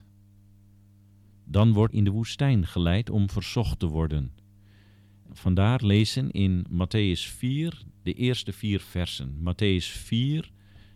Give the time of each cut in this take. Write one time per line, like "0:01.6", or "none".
0:01.9
0:05.3
0:07.9